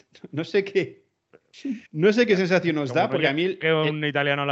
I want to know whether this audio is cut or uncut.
cut